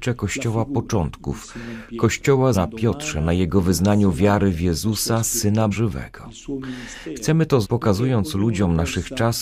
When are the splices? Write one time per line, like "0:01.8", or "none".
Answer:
0:02.5
0:05.7
0:07.6